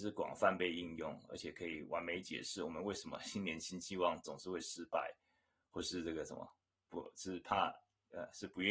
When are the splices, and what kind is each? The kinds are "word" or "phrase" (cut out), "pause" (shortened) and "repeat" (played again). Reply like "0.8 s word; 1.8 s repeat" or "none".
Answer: none